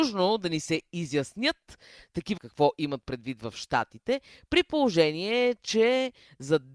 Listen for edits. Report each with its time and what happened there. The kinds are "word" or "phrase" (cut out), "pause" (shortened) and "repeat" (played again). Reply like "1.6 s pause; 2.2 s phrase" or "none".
2.4 s word